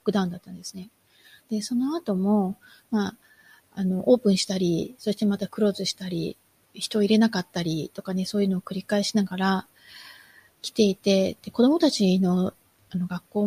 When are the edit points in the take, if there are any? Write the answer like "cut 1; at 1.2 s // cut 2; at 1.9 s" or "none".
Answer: none

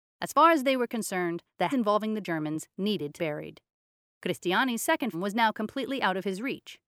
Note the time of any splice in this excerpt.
cut 1; at 1.7 s // cut 2; at 3.2 s // cut 3; at 5.1 s

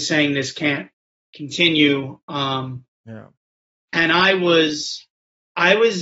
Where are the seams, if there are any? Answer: none

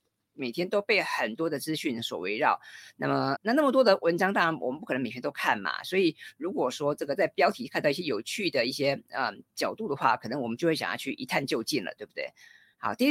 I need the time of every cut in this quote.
cut 1; at 3.4 s

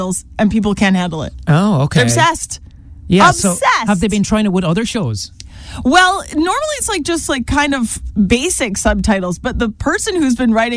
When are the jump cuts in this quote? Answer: none

